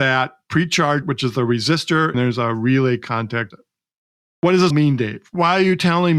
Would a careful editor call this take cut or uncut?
cut